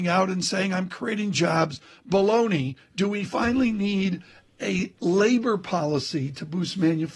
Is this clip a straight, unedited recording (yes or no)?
yes